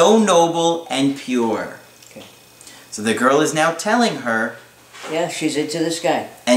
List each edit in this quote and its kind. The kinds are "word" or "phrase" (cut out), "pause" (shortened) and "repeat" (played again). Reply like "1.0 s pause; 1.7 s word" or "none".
none